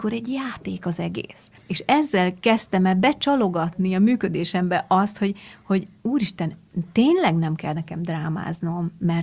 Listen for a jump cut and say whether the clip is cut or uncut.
cut